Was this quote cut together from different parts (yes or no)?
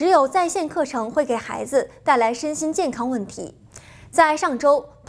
no